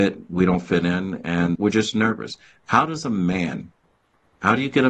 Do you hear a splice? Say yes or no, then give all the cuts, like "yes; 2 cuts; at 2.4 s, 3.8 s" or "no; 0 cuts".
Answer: yes; 1 cut; at 1.6 s